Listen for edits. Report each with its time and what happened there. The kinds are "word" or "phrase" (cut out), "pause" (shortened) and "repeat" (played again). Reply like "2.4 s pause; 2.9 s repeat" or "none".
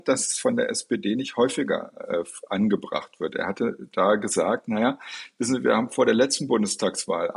none

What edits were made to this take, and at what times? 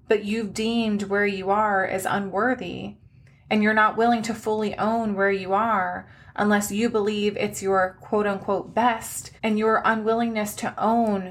9.4 s pause

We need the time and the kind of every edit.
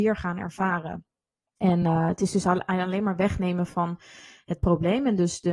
none

